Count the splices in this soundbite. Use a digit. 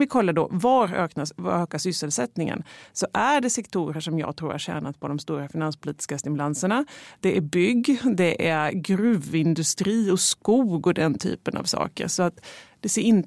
0